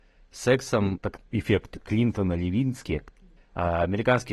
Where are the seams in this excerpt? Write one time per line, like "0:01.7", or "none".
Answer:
0:01.0
0:01.3